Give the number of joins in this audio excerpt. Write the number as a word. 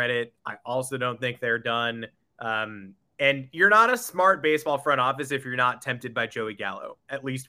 zero